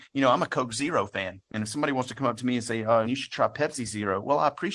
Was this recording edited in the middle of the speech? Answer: yes; 1 cut; at 3.0 s

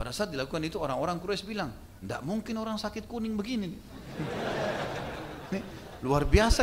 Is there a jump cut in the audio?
no; 0 cuts

